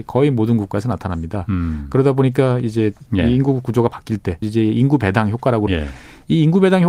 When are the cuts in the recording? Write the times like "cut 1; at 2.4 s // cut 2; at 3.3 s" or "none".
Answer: cut 1; at 3.1 s // cut 2; at 4.4 s // cut 3; at 5.7 s